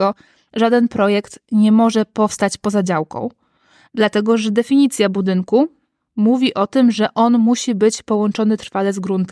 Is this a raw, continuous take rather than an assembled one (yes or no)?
yes